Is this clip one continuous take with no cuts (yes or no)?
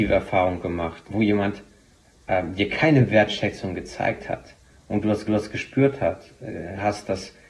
no